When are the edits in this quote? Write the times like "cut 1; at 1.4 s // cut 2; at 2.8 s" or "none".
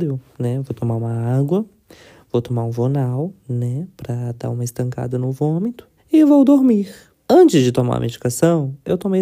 cut 1; at 6.0 s // cut 2; at 7.1 s